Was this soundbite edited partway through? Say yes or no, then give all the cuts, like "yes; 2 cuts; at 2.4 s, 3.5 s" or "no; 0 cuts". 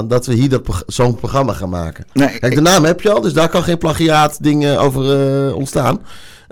yes; 1 cut; at 1.2 s